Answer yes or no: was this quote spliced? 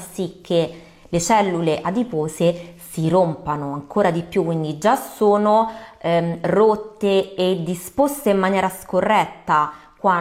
no